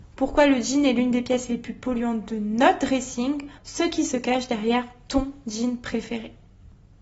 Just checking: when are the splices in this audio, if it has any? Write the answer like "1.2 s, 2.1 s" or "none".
3.6 s